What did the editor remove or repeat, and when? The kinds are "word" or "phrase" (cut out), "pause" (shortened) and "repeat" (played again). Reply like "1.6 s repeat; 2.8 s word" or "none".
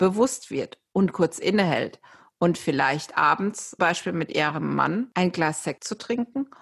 3.8 s word

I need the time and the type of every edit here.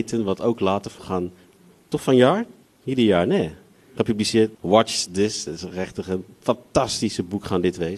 1.0 s phrase; 2.6 s pause; 4.5 s pause

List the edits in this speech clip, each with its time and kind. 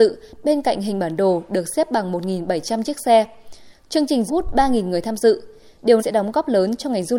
4.3 s phrase; 6.0 s word

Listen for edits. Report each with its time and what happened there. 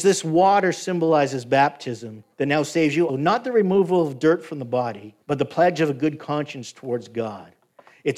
2.3 s pause; 3.1 s word; 5.2 s pause

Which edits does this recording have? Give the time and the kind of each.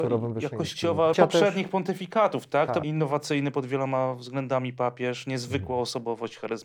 1.1 s phrase; 2.8 s phrase

